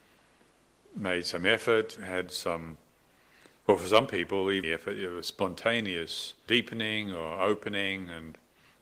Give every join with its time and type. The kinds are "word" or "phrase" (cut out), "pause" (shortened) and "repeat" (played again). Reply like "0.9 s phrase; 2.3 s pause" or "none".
2.0 s word; 3.6 s pause; 4.6 s phrase; 6.5 s word